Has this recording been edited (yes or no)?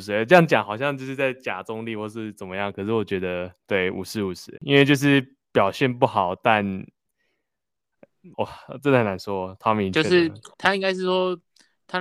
yes